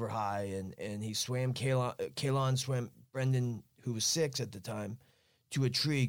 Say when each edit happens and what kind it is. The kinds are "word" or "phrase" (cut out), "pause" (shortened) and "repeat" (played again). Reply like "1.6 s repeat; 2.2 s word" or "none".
none